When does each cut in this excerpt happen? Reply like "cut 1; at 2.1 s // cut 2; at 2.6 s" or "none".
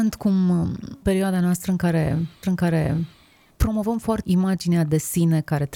cut 1; at 1.0 s // cut 2; at 2.4 s // cut 3; at 4.2 s